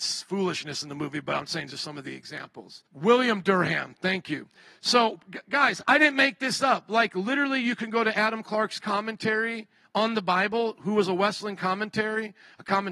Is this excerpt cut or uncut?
cut